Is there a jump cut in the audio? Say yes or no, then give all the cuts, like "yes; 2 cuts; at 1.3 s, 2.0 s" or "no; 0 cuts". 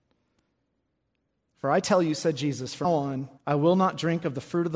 yes; 2 cuts; at 2.8 s, 3.4 s